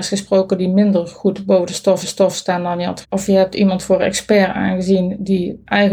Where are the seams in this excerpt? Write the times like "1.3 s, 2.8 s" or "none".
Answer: 2.0 s, 3.0 s